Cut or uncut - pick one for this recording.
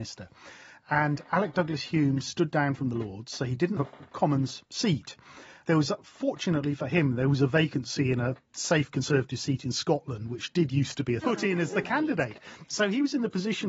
cut